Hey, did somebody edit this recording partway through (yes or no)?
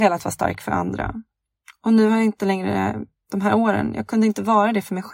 no